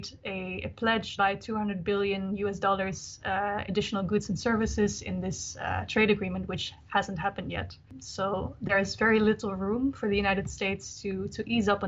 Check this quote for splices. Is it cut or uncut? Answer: cut